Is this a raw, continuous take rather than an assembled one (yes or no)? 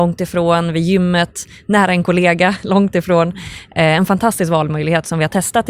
yes